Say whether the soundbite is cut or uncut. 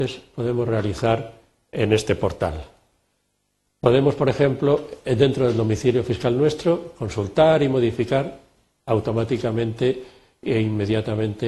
uncut